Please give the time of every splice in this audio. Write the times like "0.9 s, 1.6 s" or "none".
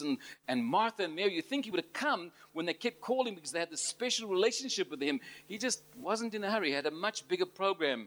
none